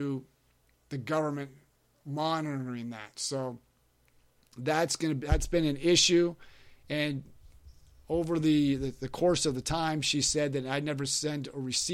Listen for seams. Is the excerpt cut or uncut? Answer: uncut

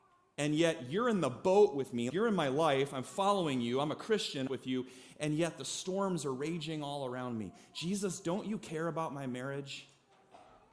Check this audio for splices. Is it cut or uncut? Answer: cut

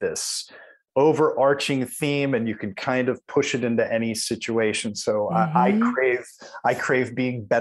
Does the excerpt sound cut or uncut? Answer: uncut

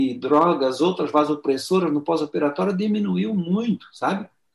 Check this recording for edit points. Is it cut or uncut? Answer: uncut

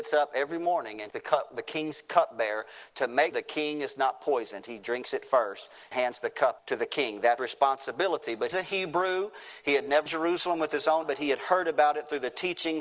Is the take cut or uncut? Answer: cut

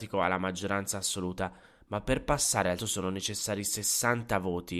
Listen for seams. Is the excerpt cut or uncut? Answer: cut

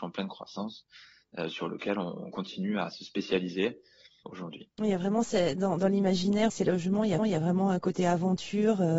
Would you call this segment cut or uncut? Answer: cut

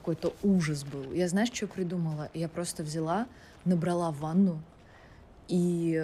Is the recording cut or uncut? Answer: uncut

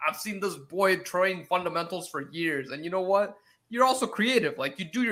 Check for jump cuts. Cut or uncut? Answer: uncut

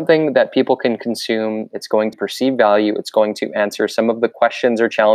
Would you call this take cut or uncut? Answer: cut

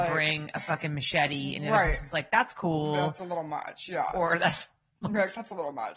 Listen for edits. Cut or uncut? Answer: uncut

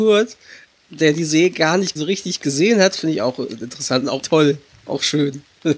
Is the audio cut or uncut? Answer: cut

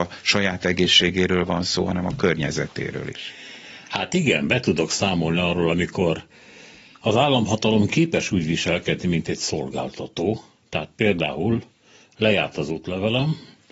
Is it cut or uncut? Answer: uncut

